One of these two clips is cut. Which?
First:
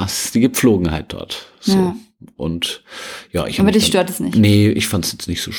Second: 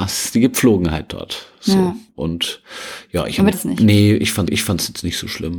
second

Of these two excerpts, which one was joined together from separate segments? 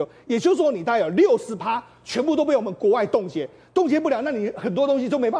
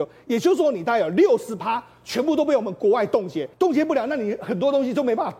second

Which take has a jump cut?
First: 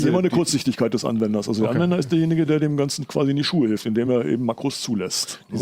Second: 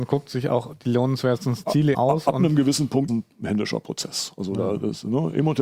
second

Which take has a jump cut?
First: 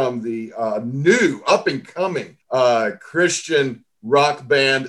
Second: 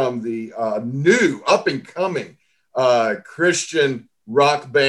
first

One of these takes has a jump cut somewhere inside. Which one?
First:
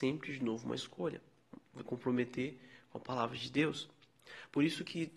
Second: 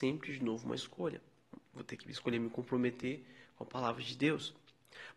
first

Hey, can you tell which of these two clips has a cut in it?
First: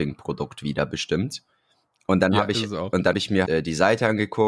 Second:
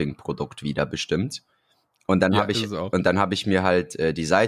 first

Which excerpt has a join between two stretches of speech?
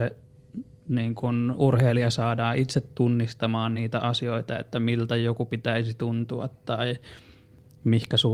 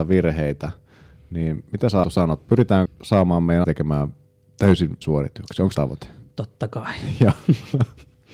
second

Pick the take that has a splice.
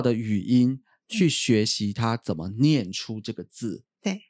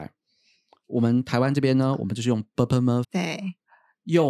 second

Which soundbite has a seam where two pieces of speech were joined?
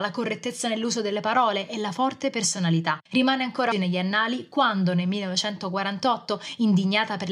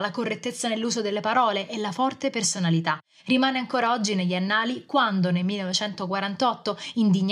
first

